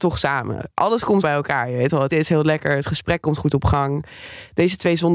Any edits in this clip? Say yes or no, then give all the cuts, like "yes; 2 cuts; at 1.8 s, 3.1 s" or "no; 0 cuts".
yes; 2 cuts; at 1.2 s, 2.1 s